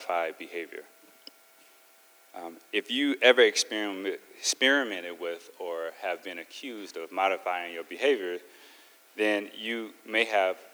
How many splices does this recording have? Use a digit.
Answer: 0